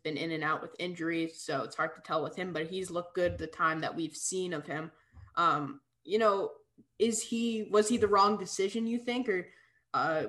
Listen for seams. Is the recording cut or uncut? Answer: uncut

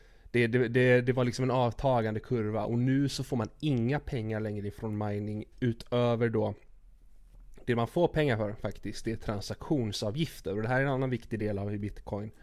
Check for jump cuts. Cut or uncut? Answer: uncut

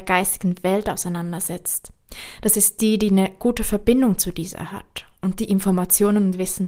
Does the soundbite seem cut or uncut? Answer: uncut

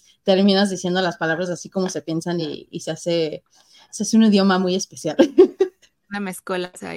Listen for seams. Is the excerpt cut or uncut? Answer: uncut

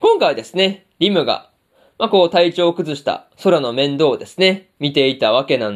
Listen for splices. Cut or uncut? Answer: uncut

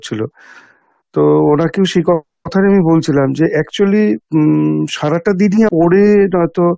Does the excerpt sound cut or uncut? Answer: cut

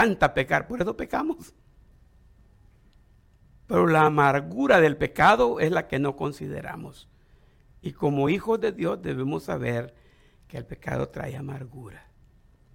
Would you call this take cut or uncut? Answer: uncut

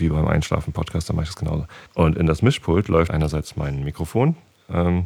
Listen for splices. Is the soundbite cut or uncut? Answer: cut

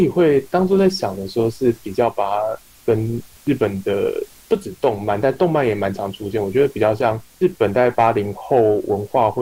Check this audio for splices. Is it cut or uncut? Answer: uncut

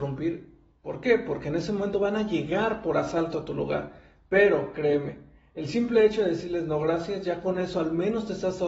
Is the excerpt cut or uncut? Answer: uncut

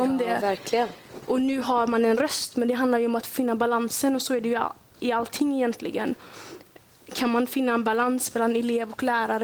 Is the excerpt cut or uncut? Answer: uncut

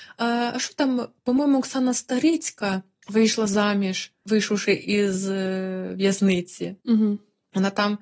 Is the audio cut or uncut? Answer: cut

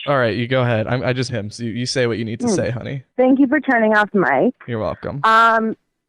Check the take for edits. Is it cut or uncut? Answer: cut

